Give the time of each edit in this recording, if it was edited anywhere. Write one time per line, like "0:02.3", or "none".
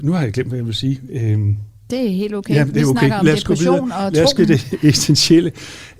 0:04.4